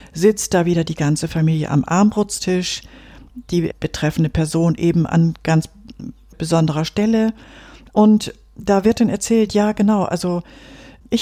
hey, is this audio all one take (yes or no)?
yes